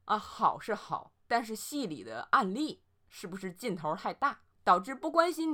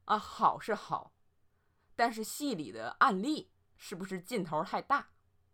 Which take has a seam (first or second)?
first